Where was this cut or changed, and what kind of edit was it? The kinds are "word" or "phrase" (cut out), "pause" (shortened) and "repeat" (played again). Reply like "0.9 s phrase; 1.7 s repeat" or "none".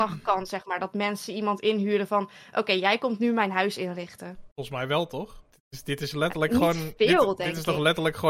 4.5 s pause